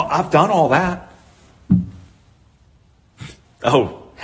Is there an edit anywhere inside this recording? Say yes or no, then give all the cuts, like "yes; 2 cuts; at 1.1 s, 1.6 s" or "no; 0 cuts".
no; 0 cuts